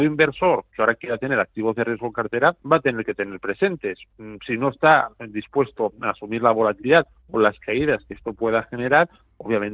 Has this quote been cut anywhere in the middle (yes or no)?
yes